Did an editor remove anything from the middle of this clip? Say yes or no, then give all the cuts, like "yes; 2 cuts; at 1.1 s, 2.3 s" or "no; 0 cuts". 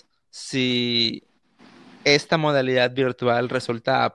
no; 0 cuts